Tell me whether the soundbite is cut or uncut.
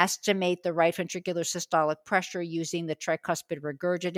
uncut